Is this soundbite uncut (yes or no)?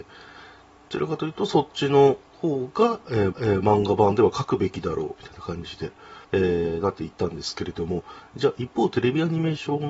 no